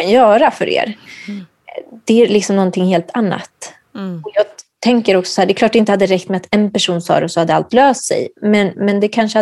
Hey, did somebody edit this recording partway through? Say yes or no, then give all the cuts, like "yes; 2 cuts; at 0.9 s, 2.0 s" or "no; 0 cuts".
no; 0 cuts